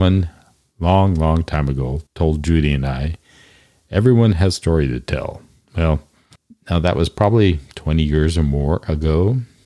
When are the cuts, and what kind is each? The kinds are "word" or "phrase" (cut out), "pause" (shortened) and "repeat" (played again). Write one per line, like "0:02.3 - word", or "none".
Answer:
0:02.1 - pause